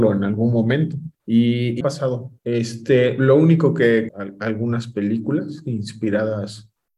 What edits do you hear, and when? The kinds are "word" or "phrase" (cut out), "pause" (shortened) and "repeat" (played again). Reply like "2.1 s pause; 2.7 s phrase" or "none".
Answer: 1.1 s pause; 1.8 s phrase; 2.4 s pause; 4.1 s phrase